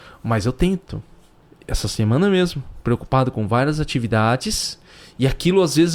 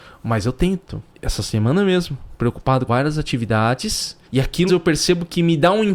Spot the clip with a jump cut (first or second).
second